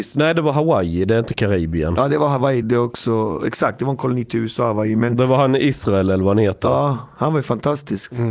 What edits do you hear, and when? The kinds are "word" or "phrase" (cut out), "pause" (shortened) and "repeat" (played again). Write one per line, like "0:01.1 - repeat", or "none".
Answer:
0:02.6 - word

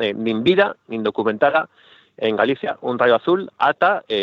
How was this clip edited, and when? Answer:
none

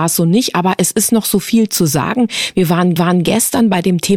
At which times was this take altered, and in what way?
0:03.0 - repeat

